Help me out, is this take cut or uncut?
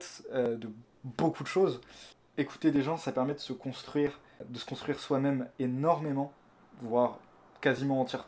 uncut